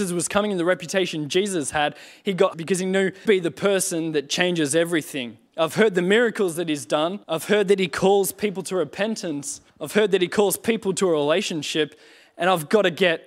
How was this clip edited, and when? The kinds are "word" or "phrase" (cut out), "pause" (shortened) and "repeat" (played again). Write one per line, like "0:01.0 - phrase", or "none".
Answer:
0:02.5 - phrase
0:03.3 - phrase
0:05.5 - pause
0:07.2 - pause
0:09.7 - pause